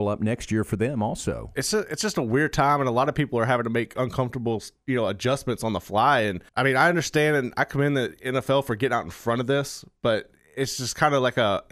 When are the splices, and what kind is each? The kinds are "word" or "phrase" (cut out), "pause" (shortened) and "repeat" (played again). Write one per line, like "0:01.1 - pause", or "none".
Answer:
0:06.5 - pause